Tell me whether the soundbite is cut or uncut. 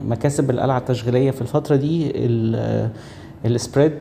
uncut